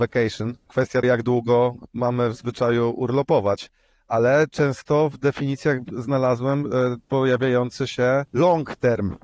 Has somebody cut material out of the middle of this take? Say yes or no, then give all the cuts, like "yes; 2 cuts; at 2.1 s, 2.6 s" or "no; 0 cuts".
yes; 1 cut; at 1.0 s